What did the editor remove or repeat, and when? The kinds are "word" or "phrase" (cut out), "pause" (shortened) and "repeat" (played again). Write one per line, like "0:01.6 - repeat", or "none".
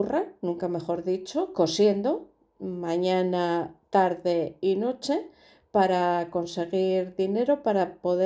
none